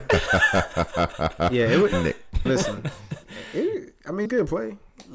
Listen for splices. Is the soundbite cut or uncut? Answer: cut